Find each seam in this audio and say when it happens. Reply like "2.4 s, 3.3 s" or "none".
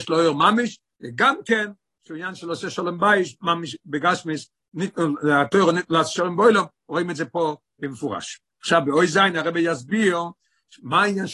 8.5 s